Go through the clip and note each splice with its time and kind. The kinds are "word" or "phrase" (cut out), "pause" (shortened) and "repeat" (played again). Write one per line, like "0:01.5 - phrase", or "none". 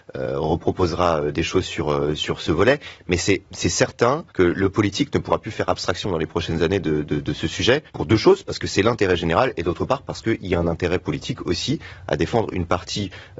0:04.3 - pause
0:07.9 - pause